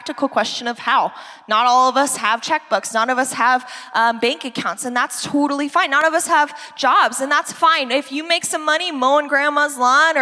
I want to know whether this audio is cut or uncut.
uncut